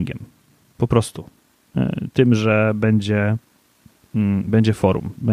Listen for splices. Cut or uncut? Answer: uncut